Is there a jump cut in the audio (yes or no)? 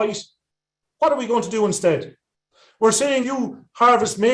yes